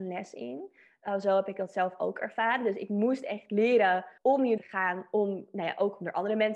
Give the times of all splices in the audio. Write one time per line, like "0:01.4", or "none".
0:04.2
0:04.6